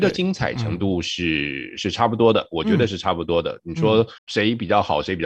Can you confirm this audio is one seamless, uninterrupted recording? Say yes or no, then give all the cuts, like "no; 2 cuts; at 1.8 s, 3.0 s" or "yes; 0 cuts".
no; 1 cut; at 4.2 s